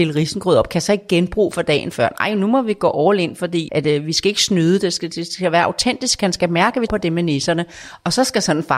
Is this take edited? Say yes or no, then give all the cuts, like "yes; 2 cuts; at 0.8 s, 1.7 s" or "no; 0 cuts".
yes; 2 cuts; at 3.7 s, 6.9 s